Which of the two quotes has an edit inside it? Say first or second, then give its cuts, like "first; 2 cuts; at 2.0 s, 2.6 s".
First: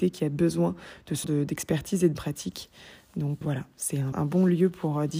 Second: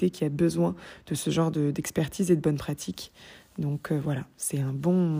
first; 4 cuts; at 1.2 s, 2.2 s, 3.4 s, 4.1 s